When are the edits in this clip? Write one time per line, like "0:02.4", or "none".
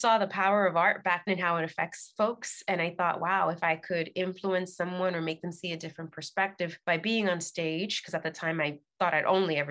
0:01.3

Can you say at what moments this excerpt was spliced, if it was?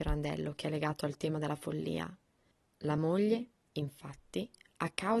none

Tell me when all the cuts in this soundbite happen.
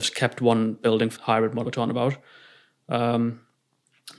0:01.2
0:01.6

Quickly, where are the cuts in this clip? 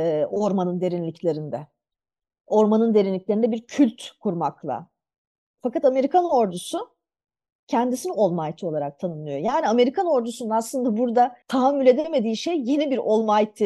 0:11.4

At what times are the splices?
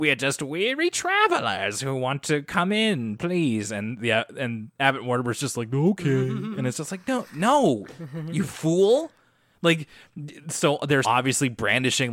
0:11.0

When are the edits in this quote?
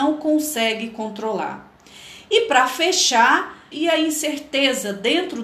0:03.7

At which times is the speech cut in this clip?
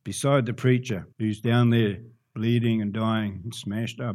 0:01.1

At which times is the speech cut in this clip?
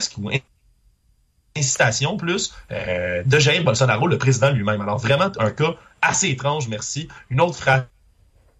none

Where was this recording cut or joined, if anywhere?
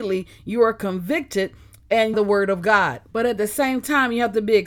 0:02.1
0:03.1

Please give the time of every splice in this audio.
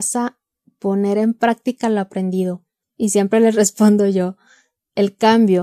0:02.8

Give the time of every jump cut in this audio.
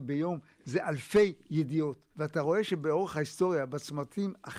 0:02.1

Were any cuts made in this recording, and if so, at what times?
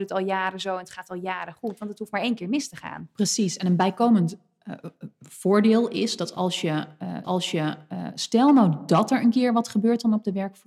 0:07.2

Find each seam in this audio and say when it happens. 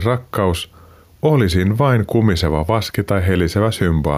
none

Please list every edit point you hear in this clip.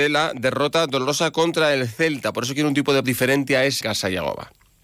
0:03.0
0:03.8

